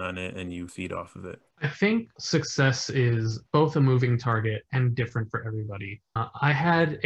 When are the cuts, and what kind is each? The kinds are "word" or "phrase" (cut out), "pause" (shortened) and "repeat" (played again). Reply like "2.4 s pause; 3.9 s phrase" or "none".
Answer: 1.5 s pause